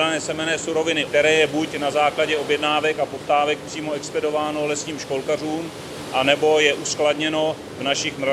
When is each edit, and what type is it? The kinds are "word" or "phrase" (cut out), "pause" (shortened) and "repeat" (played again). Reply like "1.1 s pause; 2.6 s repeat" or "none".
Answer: 1.1 s word